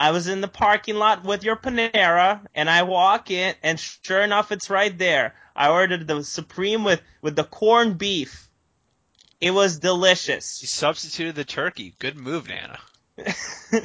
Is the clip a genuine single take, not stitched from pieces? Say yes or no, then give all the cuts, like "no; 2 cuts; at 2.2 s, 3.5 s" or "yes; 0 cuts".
yes; 0 cuts